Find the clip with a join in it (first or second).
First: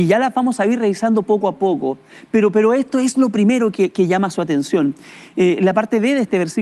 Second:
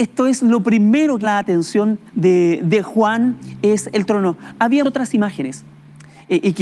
second